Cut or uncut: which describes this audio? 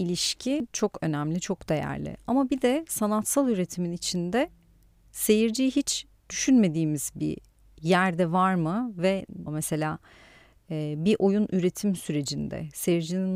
cut